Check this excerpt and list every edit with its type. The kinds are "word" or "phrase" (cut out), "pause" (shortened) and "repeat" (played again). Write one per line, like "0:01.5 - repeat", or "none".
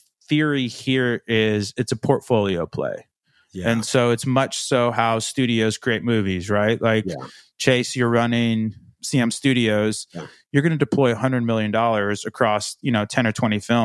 none